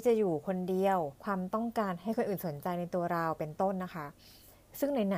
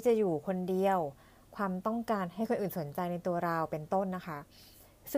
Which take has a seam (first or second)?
first